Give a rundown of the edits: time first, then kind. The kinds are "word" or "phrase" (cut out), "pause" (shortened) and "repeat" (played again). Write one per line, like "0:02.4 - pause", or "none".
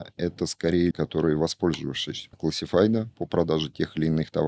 0:00.9 - word
0:02.3 - word